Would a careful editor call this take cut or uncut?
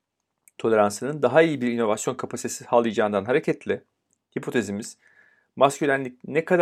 uncut